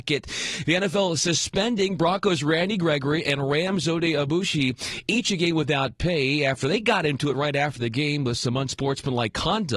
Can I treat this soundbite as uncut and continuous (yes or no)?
yes